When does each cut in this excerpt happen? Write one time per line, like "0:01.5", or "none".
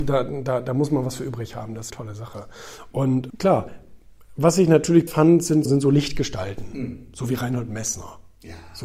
0:01.9
0:03.3
0:05.1
0:05.6